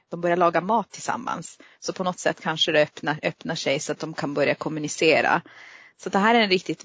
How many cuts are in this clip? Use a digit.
0